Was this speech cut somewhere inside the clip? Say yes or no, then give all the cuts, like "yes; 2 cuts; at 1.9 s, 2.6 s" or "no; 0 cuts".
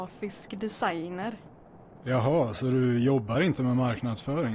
no; 0 cuts